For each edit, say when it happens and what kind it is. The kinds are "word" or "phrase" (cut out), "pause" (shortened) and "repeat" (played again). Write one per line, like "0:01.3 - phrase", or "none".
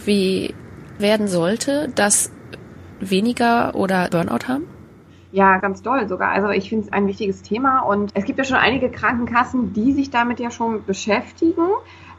0:01.0 - word
0:03.0 - word
0:04.1 - word
0:05.6 - word
0:06.9 - word
0:08.1 - word